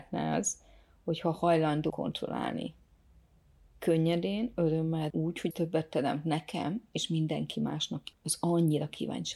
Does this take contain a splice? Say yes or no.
yes